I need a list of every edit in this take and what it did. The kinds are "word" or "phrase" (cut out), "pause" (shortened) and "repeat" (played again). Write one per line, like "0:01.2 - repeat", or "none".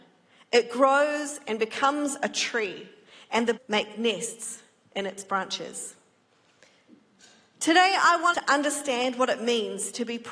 0:03.6 - word
0:08.3 - word